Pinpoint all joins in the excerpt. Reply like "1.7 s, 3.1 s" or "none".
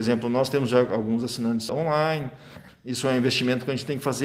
1.7 s